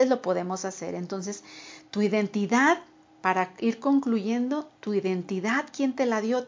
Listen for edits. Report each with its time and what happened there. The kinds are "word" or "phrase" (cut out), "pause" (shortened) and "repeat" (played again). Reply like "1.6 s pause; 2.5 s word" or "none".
none